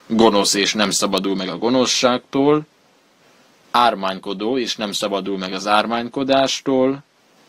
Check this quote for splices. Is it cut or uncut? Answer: uncut